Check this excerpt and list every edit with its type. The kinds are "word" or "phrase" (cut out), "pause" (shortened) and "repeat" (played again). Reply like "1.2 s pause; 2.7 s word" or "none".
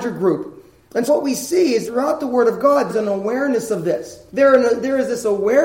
1.1 s word; 1.9 s word; 2.9 s word; 4.3 s pause